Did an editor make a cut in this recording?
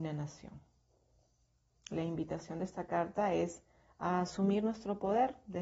no; 0 cuts

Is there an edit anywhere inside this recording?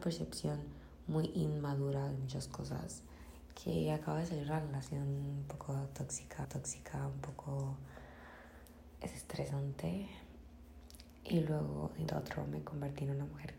yes; 2 cuts; at 6.4 s, 12.1 s

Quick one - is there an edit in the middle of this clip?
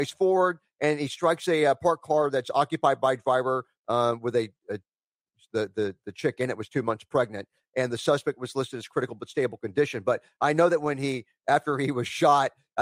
no; 0 cuts

